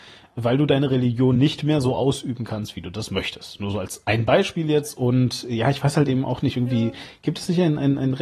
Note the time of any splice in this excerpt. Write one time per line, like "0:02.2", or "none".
none